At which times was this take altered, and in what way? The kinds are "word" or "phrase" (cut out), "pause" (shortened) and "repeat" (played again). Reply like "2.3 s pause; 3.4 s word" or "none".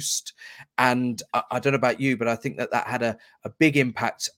none